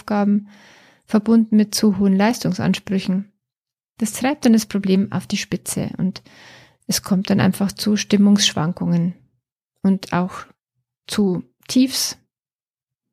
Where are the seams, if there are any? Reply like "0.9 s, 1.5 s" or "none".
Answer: none